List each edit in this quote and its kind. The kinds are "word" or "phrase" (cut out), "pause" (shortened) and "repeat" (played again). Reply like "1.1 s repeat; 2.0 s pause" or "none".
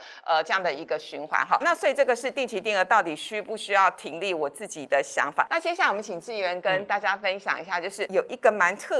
1.6 s word